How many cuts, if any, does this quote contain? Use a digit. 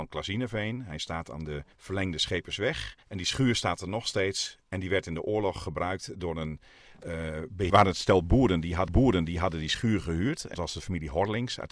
5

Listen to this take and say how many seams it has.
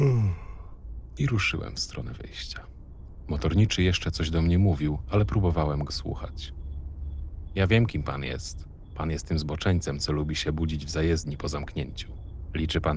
1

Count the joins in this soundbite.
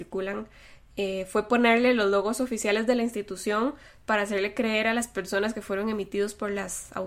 0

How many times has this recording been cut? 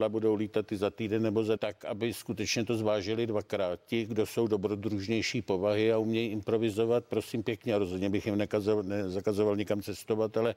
1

